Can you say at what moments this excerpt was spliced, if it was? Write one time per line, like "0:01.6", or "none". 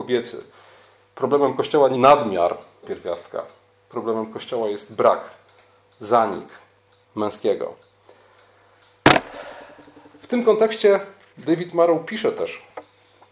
0:01.9
0:02.8
0:07.0